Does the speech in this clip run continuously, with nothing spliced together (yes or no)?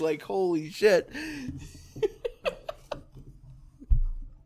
yes